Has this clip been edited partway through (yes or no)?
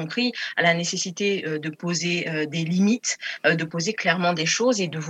no